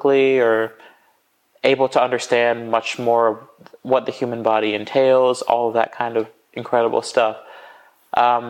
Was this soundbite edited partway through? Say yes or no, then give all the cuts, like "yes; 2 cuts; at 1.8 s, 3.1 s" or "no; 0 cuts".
no; 0 cuts